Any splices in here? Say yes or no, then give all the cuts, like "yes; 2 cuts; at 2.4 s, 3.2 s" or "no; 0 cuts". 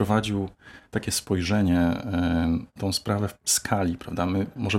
yes; 2 cuts; at 2.8 s, 3.4 s